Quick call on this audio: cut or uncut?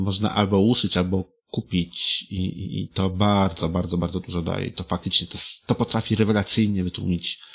uncut